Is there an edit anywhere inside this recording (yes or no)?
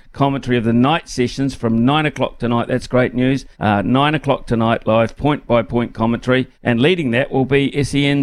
yes